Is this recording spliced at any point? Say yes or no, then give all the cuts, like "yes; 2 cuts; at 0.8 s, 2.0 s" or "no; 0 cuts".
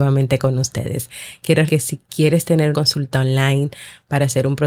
yes; 2 cuts; at 1.7 s, 2.7 s